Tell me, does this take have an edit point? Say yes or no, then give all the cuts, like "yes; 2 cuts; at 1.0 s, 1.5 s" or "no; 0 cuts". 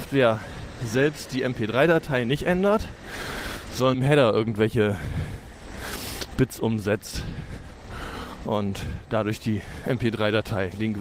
yes; 1 cut; at 3.9 s